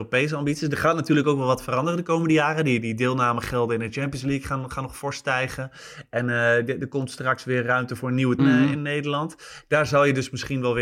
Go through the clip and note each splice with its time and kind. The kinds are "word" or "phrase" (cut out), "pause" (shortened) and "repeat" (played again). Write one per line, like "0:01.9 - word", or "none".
0:08.4 - phrase